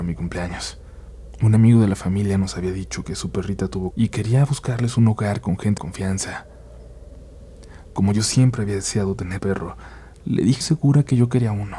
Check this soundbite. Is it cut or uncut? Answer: cut